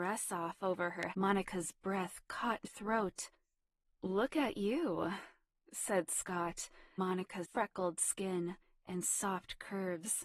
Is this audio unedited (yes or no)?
no